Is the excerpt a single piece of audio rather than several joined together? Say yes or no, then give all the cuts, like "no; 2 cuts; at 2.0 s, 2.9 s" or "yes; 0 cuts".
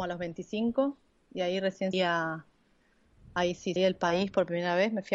no; 2 cuts; at 1.9 s, 3.8 s